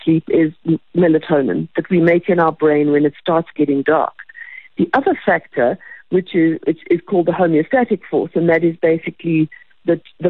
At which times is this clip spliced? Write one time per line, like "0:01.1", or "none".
none